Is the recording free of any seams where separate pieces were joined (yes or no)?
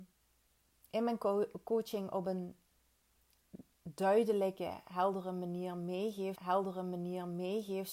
no